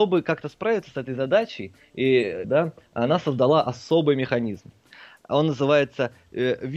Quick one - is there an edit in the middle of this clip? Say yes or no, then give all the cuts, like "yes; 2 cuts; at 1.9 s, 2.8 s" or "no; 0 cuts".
yes; 1 cut; at 2.4 s